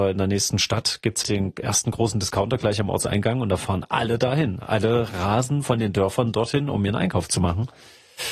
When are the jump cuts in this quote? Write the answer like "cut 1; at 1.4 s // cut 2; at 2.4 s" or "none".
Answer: cut 1; at 1.2 s